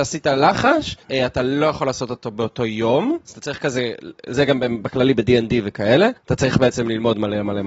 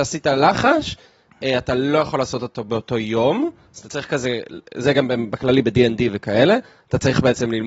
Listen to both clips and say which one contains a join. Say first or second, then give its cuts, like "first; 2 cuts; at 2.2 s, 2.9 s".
first; 3 cuts; at 1.0 s, 3.2 s, 6.2 s